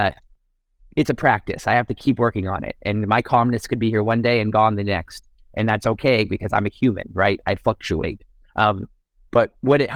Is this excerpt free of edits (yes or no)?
yes